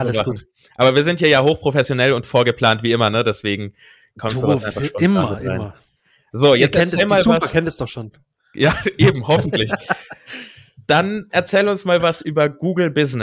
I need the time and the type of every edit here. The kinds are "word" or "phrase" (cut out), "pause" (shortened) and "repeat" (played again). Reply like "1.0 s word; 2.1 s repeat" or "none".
none